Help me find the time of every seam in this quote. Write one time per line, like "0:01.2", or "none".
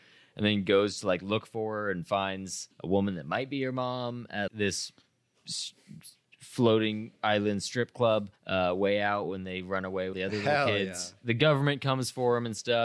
0:02.7
0:04.5
0:07.2
0:08.4
0:10.1